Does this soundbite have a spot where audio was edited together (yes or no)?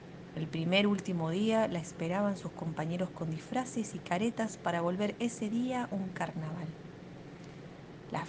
no